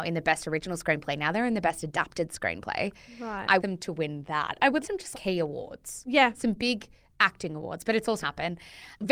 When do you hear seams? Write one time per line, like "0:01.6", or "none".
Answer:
0:03.6
0:04.8
0:05.1
0:08.2